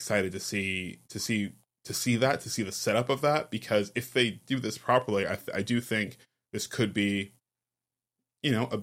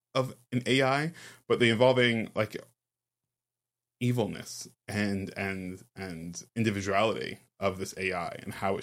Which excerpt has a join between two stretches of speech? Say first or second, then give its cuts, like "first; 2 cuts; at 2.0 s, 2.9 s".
second; 2 cuts; at 4.7 s, 6.5 s